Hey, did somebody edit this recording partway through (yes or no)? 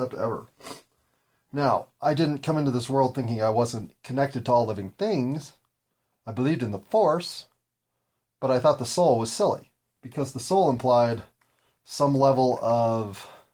no